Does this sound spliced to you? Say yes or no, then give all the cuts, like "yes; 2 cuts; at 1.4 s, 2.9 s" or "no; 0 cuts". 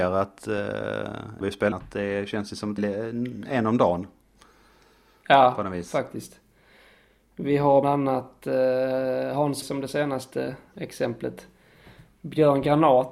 yes; 5 cuts; at 1.4 s, 1.7 s, 2.8 s, 7.8 s, 9.6 s